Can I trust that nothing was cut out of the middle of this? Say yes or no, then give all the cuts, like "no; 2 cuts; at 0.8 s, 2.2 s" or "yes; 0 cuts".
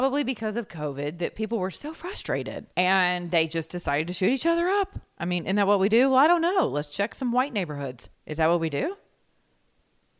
no; 2 cuts; at 2.7 s, 8.1 s